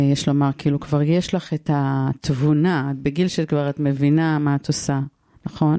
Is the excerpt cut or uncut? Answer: uncut